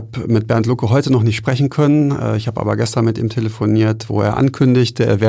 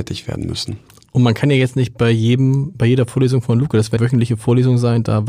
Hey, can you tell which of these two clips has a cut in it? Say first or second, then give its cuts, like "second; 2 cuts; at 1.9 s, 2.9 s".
second; 1 cut; at 4.0 s